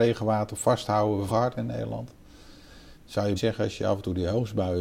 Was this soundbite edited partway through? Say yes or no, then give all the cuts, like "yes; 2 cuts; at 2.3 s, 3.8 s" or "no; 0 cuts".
yes; 3 cuts; at 1.3 s, 2.9 s, 3.4 s